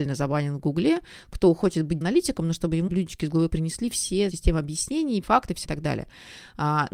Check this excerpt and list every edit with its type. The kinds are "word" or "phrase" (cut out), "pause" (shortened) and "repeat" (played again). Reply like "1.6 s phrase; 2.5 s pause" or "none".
2.0 s word; 2.9 s word; 3.5 s word; 4.3 s word; 5.2 s word; 5.6 s word